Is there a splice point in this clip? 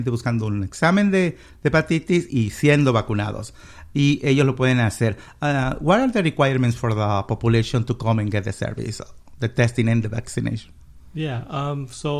yes; 1 cut; at 2.3 s

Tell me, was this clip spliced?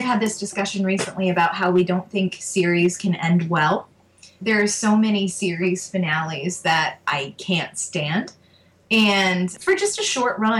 no; 0 cuts

